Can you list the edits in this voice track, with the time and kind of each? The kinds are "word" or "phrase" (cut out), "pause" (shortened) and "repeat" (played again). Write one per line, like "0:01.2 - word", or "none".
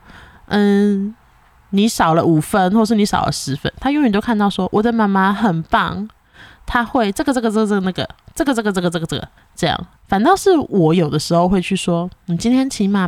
0:09.4 - pause
0:10.0 - pause